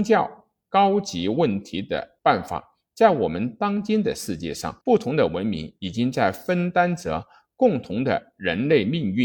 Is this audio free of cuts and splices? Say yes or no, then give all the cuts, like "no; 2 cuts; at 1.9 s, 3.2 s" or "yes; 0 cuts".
no; 2 cuts; at 2.2 s, 4.8 s